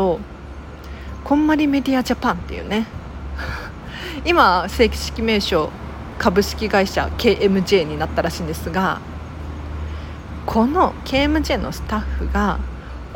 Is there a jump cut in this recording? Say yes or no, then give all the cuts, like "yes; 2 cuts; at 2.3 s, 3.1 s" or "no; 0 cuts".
no; 0 cuts